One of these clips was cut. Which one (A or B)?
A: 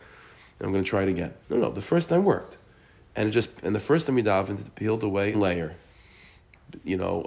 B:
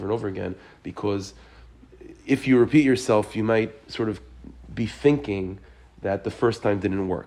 A